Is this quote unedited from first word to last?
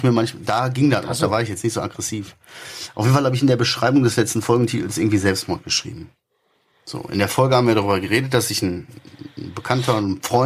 yes; 0 cuts

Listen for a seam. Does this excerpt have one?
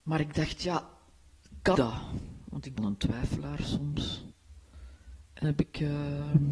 yes; 3 cuts; at 1.7 s, 2.8 s, 5.4 s

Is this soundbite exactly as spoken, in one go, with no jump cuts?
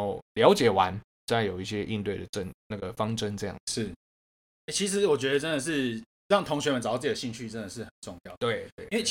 no; 1 cut; at 3.6 s

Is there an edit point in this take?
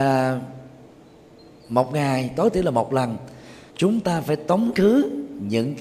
yes; 1 cut; at 3.7 s

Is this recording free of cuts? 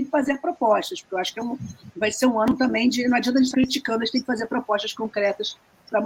no; 1 cut; at 3.5 s

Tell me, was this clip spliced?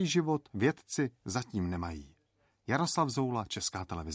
no; 0 cuts

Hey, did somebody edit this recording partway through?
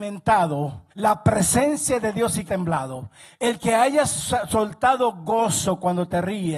yes; 2 cuts; at 0.9 s, 2.5 s

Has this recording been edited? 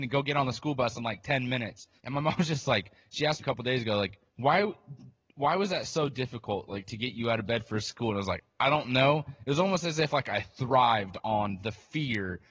yes; 3 cuts; at 2.0 s, 3.4 s, 4.3 s

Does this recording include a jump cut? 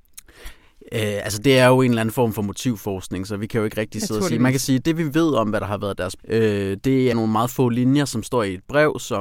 yes; 3 cuts; at 4.8 s, 6.2 s, 7.1 s

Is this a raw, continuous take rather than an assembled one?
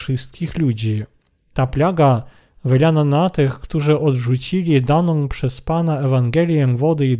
yes; 0 cuts

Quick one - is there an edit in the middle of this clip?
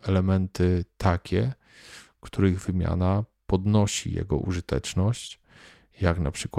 no; 0 cuts

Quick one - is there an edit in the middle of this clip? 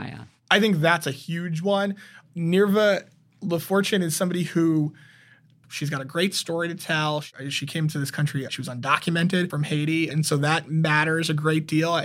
yes; 1 cut; at 8.5 s

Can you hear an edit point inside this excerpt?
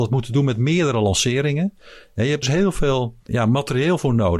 yes; 2 cuts; at 2.4 s, 3.3 s

